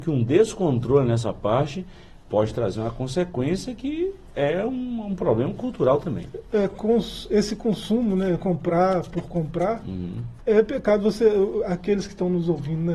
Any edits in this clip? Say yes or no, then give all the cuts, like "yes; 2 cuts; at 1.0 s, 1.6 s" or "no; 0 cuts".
no; 0 cuts